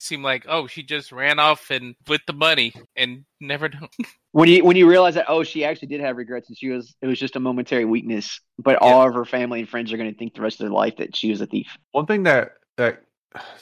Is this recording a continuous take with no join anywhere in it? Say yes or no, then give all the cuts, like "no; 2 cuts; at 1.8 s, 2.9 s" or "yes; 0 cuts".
no; 4 cuts; at 2.0 s, 2.9 s, 3.9 s, 11.8 s